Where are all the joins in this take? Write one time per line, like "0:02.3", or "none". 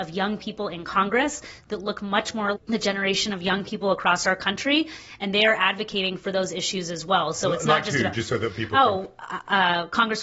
0:02.5